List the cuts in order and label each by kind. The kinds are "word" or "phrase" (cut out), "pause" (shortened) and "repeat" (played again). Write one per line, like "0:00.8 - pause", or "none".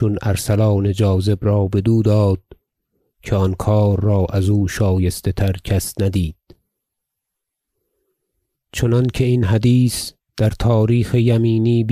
none